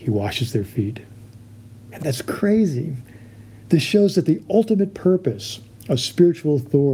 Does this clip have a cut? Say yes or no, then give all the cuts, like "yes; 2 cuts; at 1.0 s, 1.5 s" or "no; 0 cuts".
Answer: no; 0 cuts